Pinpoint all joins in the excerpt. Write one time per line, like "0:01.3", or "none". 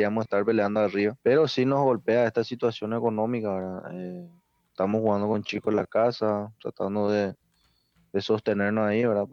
0:01.2